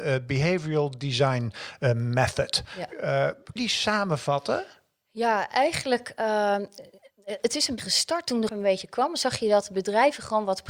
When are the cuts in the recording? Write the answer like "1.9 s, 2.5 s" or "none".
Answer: 3.6 s, 7.8 s, 8.5 s